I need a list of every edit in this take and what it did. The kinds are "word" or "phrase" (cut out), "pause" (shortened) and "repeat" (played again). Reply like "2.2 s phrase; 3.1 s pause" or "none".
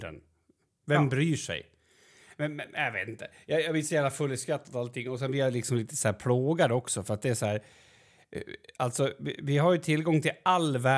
none